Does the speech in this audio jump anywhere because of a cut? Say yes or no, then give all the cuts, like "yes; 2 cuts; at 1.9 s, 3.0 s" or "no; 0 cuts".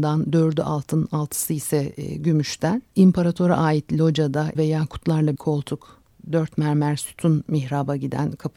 yes; 3 cuts; at 2.9 s, 4.5 s, 5.3 s